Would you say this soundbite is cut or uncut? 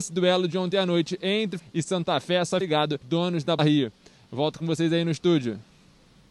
cut